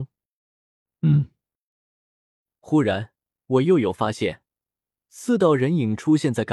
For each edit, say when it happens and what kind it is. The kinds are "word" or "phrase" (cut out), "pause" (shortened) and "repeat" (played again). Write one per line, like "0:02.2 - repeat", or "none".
none